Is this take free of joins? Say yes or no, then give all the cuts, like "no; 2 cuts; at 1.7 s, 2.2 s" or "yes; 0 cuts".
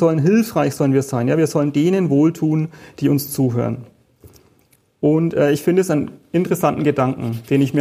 yes; 0 cuts